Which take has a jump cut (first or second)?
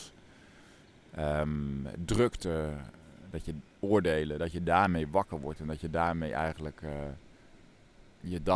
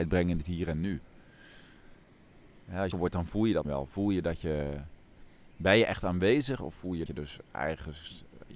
second